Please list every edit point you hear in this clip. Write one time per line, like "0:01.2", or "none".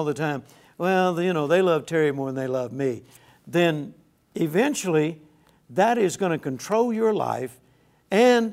none